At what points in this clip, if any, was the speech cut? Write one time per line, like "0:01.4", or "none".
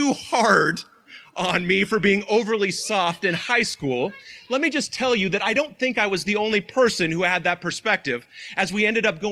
none